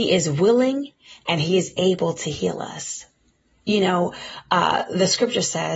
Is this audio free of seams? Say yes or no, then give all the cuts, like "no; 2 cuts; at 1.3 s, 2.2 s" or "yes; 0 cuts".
yes; 0 cuts